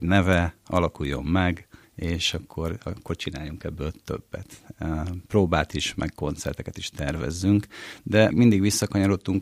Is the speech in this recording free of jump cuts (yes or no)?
no